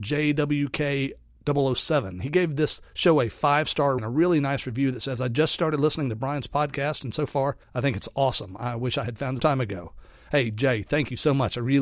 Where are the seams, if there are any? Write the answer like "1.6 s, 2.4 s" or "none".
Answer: 2.9 s, 4.0 s, 7.6 s, 9.4 s